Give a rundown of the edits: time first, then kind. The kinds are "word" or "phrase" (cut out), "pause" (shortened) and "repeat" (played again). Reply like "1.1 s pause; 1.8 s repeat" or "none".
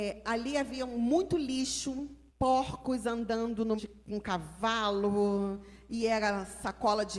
2.3 s pause; 3.8 s word